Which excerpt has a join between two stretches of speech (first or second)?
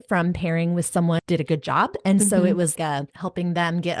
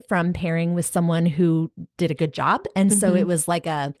first